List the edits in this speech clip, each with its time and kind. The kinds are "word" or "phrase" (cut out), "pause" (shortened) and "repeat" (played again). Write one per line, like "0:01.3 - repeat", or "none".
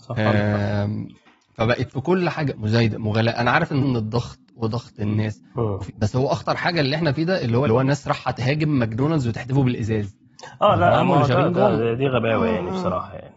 0:01.3 - pause
0:02.5 - word
0:03.8 - word
0:05.9 - phrase
0:07.7 - phrase